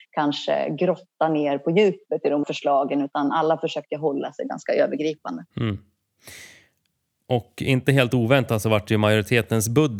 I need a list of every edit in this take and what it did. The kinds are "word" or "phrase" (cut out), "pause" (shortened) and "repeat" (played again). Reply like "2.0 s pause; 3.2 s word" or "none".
2.4 s word; 5.5 s pause